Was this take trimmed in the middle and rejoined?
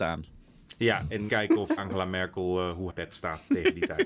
yes; 3 cuts; at 1.3 s, 1.8 s, 2.9 s

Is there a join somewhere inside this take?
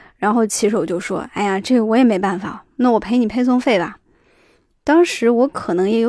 no; 0 cuts

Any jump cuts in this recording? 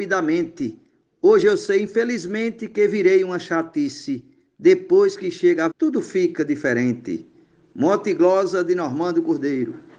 yes; 1 cut; at 5.7 s

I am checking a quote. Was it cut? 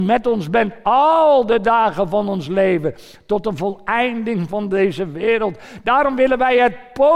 no; 0 cuts

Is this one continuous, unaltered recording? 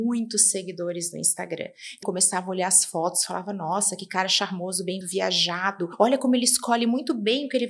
no; 2 cuts; at 2.0 s, 5.0 s

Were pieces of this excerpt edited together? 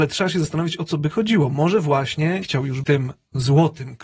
yes; 3 cuts; at 1.1 s, 2.4 s, 2.8 s

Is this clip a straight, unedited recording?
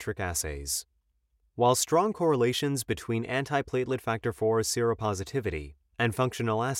yes; 0 cuts

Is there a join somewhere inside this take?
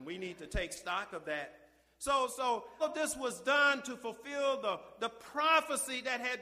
yes; 2 cuts; at 2.3 s, 2.8 s

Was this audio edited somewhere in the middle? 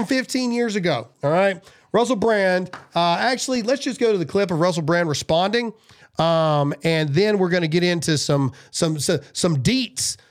yes; 1 cut; at 1.1 s

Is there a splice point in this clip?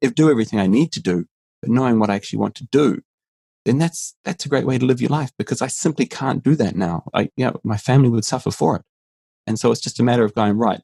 no; 0 cuts

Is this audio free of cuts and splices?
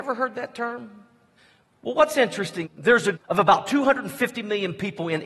no; 3 cuts; at 1.4 s, 2.6 s, 3.1 s

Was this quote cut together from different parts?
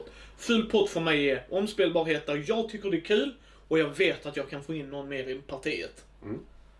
no; 0 cuts

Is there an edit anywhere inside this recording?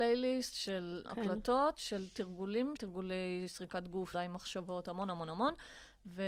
yes; 3 cuts; at 1.1 s, 2.8 s, 4.1 s

